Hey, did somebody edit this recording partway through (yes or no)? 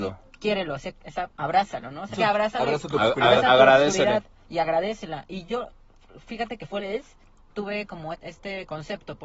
yes